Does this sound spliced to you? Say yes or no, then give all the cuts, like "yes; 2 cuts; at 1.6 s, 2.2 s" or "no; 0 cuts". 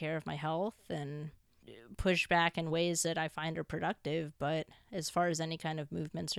no; 0 cuts